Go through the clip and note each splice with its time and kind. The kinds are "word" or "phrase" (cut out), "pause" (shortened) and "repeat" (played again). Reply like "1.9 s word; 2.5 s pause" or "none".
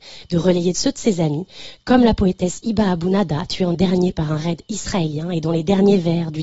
3.7 s word

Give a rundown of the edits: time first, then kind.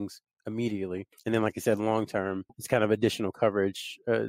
none

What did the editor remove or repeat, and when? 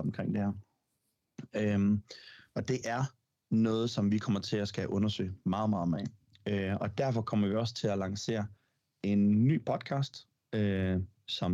none

